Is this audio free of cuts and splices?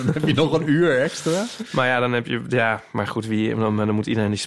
yes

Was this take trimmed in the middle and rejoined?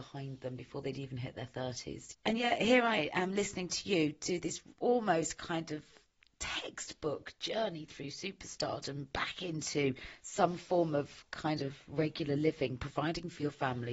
no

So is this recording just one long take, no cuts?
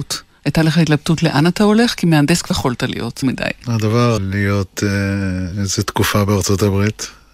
no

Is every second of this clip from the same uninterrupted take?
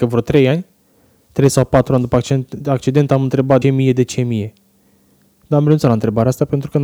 no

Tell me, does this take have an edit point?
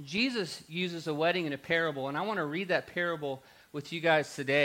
no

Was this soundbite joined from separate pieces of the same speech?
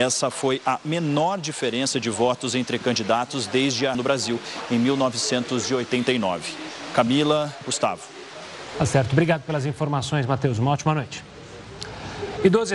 yes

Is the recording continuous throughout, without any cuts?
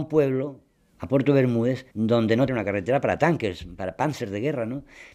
no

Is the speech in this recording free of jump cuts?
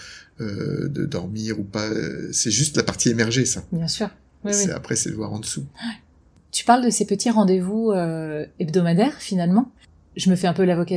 yes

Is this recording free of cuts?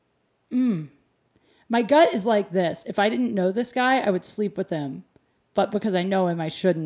yes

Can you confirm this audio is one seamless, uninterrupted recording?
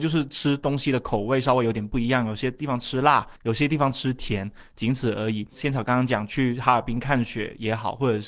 no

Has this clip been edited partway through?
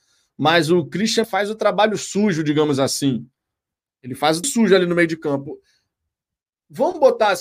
yes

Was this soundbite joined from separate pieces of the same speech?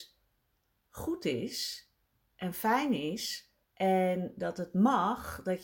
yes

